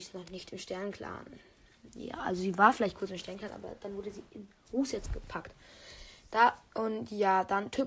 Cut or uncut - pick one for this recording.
uncut